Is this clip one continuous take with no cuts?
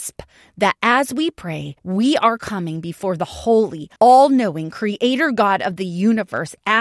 no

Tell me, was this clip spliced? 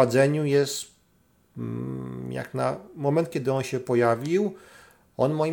no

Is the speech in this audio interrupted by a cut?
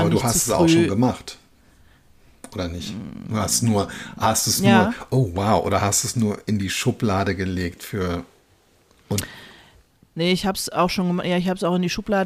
no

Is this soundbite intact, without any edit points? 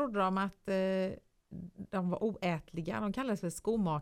yes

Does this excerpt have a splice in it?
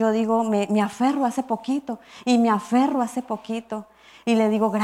no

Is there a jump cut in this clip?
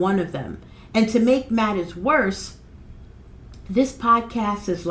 no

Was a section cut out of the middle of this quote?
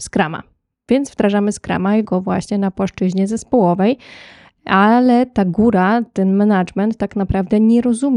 yes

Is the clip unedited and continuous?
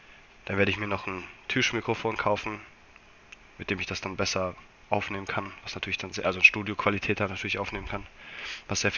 yes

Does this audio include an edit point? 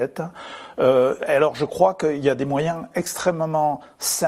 no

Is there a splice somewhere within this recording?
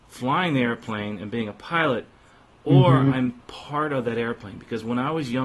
no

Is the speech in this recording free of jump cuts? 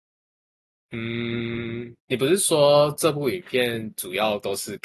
no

